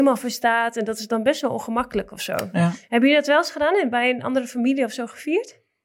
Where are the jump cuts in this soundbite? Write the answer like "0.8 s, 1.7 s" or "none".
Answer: none